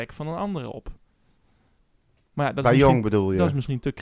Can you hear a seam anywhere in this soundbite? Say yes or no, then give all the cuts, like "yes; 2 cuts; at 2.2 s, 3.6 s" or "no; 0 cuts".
no; 0 cuts